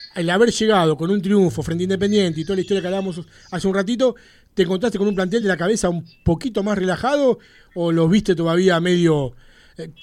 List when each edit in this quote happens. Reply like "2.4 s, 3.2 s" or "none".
none